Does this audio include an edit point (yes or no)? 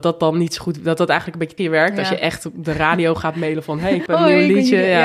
yes